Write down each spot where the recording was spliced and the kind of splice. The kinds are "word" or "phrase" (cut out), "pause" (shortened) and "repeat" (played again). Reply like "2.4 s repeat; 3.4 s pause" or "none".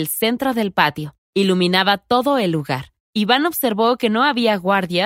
1.2 s pause; 3.0 s pause